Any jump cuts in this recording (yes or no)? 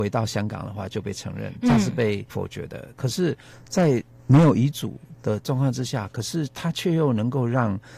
no